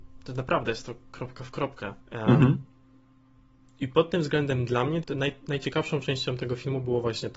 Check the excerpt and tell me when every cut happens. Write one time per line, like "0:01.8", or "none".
0:02.0
0:05.0